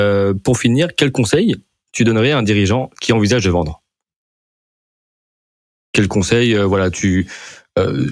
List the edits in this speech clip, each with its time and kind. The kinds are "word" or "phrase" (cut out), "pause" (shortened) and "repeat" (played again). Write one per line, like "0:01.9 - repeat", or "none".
none